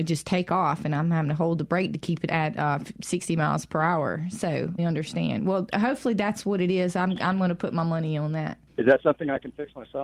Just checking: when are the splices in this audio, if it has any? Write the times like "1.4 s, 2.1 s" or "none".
2.3 s, 4.8 s, 8.7 s